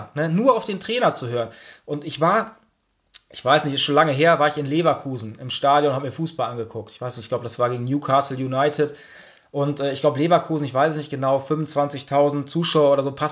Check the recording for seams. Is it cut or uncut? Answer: uncut